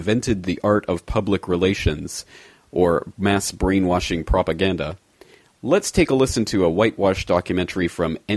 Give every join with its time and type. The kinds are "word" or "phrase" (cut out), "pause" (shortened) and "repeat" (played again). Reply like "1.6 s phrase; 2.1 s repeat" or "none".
none